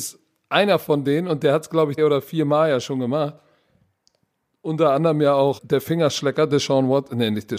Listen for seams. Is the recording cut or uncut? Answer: cut